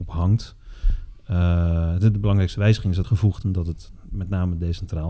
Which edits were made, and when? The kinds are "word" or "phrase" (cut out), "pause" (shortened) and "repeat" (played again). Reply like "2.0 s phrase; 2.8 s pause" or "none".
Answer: 3.0 s phrase